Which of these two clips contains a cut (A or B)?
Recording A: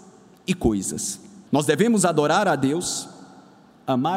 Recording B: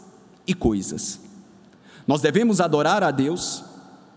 A